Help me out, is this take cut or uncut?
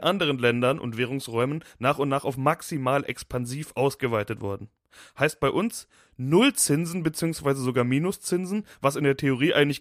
uncut